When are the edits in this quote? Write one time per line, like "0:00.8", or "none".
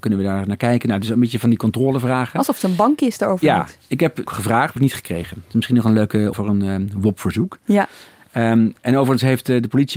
0:04.3
0:04.8
0:06.3